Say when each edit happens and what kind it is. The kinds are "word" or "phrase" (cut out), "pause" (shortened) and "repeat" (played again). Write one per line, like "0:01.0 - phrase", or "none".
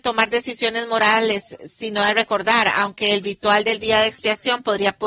none